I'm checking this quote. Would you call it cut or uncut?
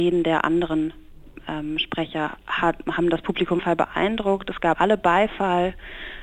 cut